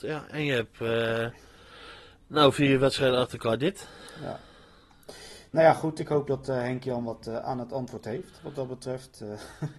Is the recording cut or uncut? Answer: uncut